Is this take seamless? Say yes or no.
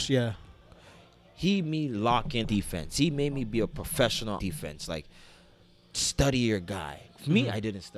no